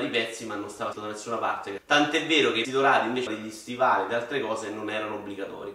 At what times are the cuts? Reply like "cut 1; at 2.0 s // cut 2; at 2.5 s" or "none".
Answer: cut 1; at 0.9 s // cut 2; at 1.8 s // cut 3; at 2.6 s // cut 4; at 3.3 s